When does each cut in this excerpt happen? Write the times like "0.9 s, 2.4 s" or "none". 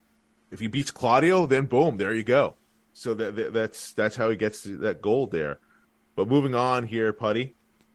none